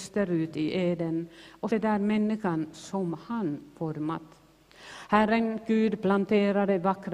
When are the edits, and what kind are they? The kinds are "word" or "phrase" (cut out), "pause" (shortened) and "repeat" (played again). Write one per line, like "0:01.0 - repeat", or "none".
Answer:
0:01.7 - word